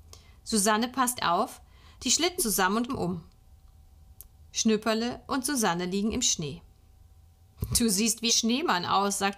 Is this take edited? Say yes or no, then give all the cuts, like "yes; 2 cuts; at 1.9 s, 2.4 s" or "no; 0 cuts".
yes; 4 cuts; at 1.2 s, 2.4 s, 2.9 s, 8.3 s